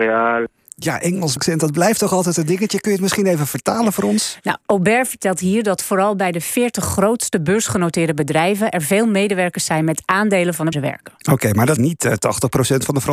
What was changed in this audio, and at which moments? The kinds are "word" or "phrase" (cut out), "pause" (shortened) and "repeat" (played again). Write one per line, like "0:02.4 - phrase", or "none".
0:01.4 - phrase
0:10.7 - phrase
0:11.8 - word